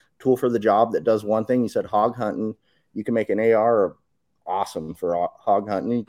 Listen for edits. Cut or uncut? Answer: uncut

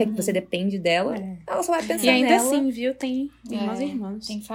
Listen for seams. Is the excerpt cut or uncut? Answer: uncut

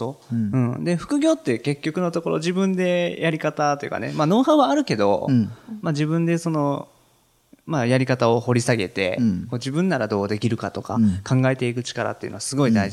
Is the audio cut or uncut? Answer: uncut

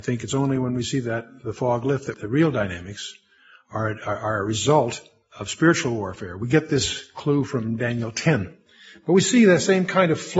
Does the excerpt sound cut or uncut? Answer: cut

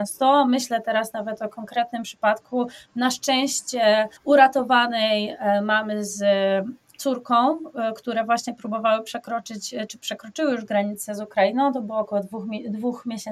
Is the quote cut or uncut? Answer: cut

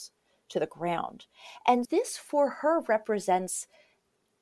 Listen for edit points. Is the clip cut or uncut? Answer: cut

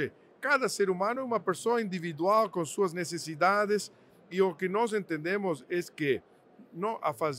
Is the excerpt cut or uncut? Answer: uncut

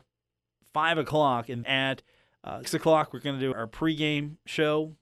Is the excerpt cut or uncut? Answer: cut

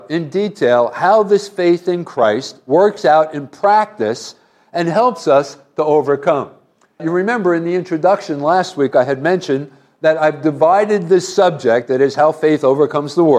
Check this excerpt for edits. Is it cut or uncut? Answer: uncut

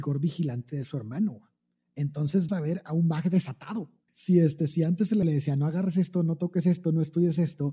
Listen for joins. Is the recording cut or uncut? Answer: cut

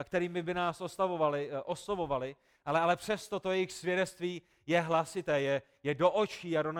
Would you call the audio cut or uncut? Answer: uncut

